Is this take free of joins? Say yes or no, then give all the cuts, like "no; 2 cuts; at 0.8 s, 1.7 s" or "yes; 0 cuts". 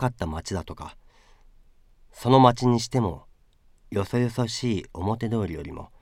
yes; 0 cuts